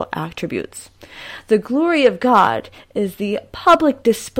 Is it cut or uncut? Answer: uncut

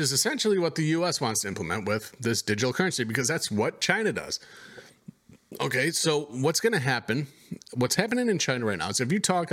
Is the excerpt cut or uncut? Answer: uncut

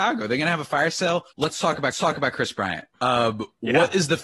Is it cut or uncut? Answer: cut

